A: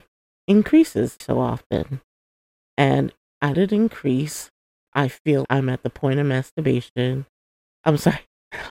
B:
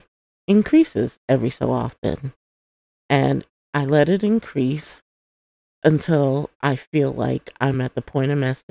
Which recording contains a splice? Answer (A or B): A